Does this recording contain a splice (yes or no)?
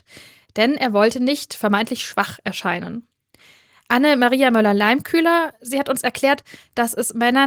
no